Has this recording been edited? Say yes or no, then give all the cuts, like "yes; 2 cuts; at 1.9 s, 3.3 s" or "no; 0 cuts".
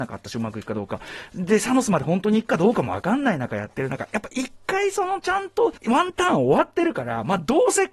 yes; 1 cut; at 5.8 s